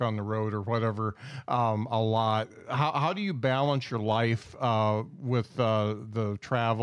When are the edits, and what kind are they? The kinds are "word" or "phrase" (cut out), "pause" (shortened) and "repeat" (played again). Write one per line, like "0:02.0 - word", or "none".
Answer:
none